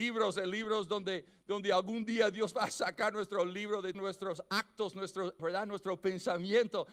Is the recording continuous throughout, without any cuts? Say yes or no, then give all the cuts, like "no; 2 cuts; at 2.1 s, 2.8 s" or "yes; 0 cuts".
no; 2 cuts; at 3.9 s, 5.4 s